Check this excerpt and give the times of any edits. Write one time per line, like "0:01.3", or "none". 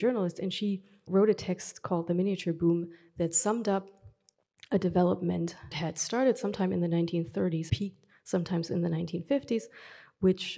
0:01.1
0:05.7
0:07.7